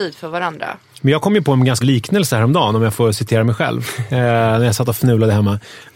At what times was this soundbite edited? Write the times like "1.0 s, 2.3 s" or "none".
1.8 s, 4.1 s